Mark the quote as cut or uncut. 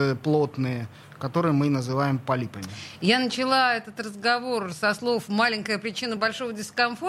uncut